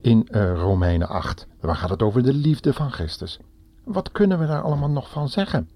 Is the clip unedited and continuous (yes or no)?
no